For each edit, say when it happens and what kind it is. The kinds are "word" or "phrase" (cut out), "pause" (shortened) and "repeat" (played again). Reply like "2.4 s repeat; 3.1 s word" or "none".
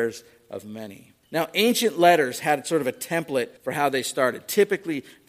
1.2 s pause; 3.6 s pause